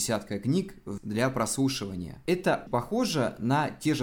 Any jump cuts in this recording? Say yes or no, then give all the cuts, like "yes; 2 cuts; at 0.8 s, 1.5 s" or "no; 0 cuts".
yes; 2 cuts; at 1.0 s, 2.7 s